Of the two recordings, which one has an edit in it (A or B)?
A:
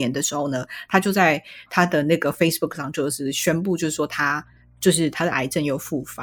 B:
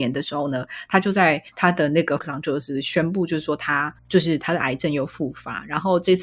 B